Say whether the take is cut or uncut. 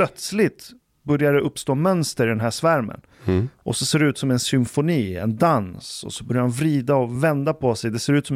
uncut